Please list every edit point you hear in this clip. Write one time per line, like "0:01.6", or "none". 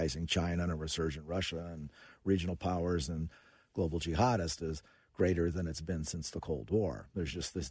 none